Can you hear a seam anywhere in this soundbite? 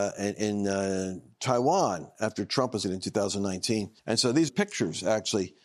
yes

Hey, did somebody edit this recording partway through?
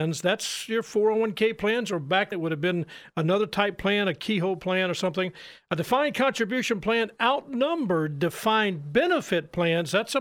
yes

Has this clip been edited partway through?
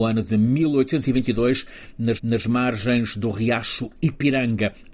yes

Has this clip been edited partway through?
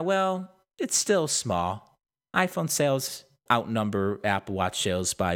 yes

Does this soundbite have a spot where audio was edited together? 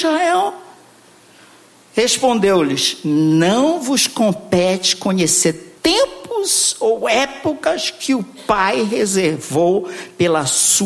yes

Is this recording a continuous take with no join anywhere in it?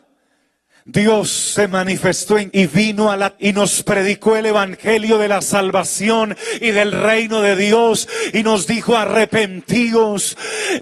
no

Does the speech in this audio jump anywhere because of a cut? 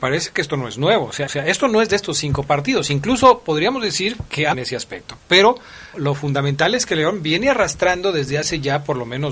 yes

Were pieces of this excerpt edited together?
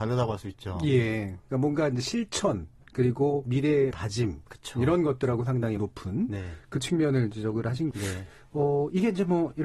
yes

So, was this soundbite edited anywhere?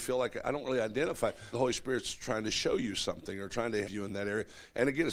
yes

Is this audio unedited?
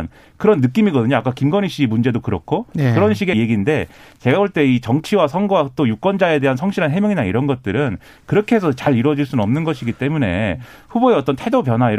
no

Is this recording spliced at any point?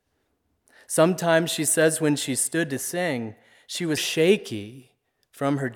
yes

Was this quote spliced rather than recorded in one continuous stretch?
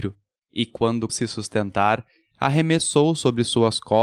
yes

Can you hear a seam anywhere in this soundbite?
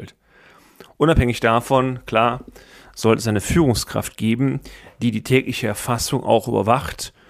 no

